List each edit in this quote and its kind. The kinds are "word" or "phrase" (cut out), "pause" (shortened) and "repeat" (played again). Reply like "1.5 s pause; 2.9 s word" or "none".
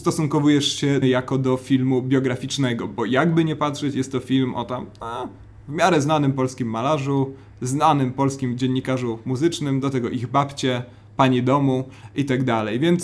1.0 s phrase